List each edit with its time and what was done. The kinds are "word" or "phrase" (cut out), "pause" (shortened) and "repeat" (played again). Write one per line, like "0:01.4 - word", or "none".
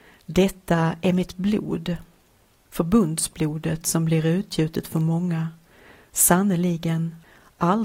none